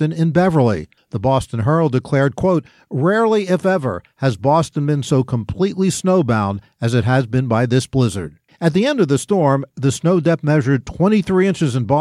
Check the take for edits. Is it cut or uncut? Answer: uncut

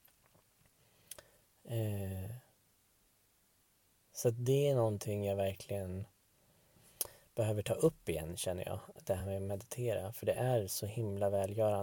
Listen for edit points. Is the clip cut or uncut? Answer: uncut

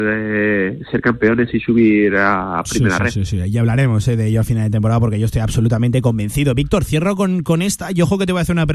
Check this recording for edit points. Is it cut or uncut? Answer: uncut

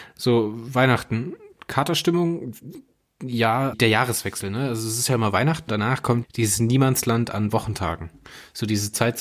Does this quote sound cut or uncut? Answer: cut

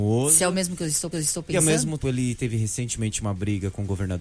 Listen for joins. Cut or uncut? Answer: cut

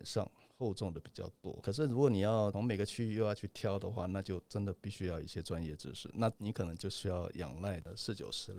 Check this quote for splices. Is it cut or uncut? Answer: uncut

